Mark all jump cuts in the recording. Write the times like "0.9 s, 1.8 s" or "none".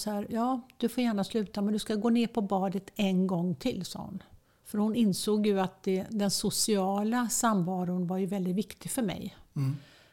none